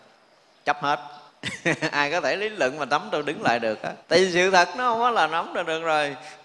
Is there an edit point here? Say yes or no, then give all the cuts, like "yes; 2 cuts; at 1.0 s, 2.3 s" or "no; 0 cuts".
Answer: yes; 2 cuts; at 1.3 s, 4.0 s